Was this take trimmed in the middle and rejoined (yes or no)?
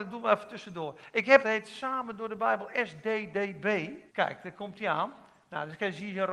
yes